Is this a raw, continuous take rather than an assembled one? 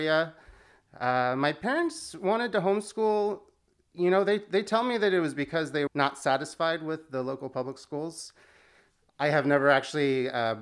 no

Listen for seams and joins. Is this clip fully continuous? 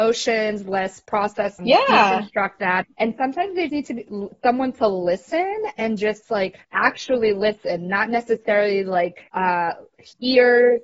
no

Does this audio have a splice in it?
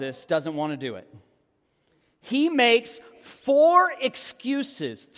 no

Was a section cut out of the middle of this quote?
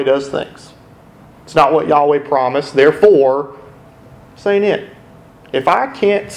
no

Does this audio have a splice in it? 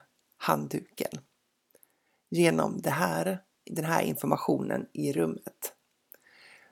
no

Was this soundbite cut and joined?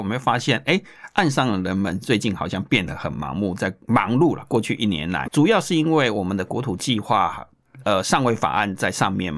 yes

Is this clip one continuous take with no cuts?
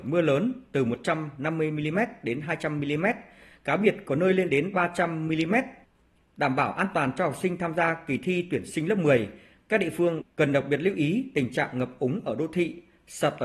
yes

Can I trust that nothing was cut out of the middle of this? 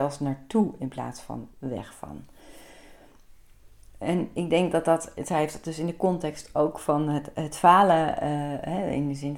no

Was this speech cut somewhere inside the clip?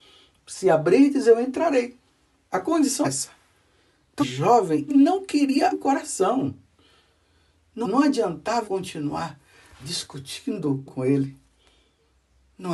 yes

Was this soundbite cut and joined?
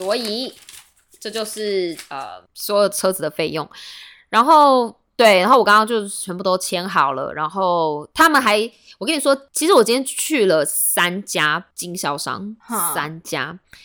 yes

